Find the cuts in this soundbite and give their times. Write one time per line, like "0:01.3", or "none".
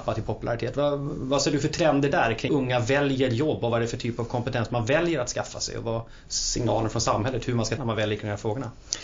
0:02.5
0:07.8